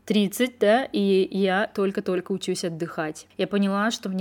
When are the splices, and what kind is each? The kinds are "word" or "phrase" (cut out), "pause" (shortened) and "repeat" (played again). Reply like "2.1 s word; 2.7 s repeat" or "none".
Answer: none